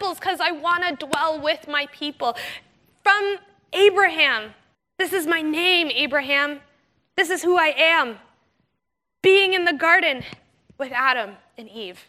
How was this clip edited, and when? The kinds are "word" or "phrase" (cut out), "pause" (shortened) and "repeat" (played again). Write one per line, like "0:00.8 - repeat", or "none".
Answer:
none